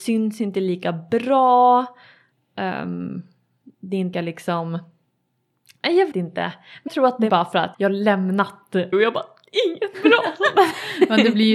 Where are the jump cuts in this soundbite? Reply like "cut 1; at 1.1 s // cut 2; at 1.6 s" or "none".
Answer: cut 1; at 4.1 s // cut 2; at 6.1 s // cut 3; at 6.9 s // cut 4; at 7.3 s // cut 5; at 7.7 s // cut 6; at 8.9 s // cut 7; at 9.9 s